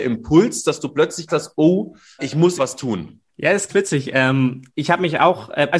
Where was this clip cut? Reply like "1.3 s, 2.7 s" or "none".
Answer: 1.3 s, 2.2 s, 2.6 s, 3.3 s, 3.7 s, 4.7 s